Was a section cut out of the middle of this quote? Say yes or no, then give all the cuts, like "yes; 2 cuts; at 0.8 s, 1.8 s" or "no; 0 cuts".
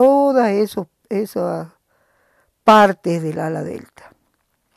no; 0 cuts